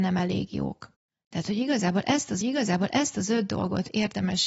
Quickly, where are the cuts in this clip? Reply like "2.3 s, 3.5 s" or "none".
1.1 s, 2.4 s